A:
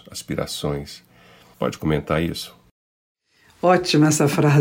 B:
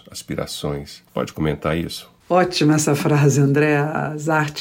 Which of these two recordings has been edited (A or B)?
B